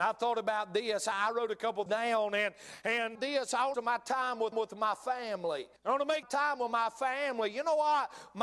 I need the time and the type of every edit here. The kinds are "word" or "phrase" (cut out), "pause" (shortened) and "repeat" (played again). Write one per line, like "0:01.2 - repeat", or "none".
0:01.9 - word
0:03.2 - phrase
0:03.7 - phrase
0:04.5 - repeat
0:05.8 - pause
0:06.2 - phrase